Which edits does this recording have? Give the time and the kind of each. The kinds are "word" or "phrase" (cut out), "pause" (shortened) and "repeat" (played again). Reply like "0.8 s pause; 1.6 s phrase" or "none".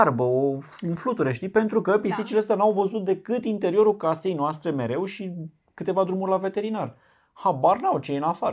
none